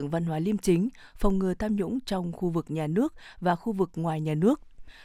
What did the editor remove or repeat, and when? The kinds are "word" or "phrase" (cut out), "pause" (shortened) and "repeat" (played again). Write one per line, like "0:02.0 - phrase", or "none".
none